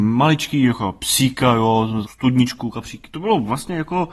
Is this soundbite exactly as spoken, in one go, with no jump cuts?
no; 1 cut; at 2.0 s

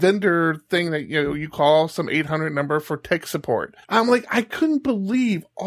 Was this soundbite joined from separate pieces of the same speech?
yes; 1 cut; at 3.8 s

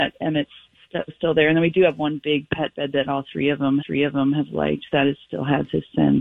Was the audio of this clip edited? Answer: yes; 2 cuts; at 1.1 s, 3.8 s

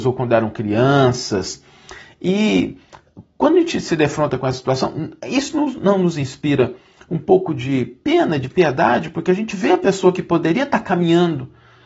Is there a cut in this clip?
yes; 1 cut; at 5.2 s

